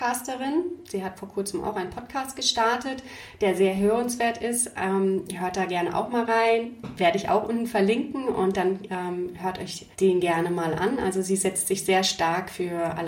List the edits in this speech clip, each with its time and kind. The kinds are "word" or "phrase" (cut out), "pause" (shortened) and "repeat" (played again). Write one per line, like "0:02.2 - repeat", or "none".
0:09.9 - pause